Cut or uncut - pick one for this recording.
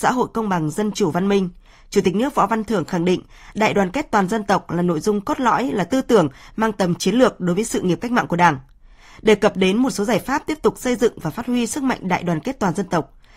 uncut